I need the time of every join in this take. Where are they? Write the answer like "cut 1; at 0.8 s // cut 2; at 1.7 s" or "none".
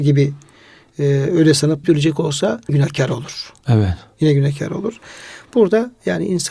cut 1; at 1.8 s // cut 2; at 2.7 s